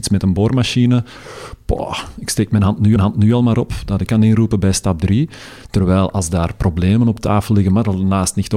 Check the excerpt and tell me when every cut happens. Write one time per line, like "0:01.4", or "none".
0:03.0
0:04.1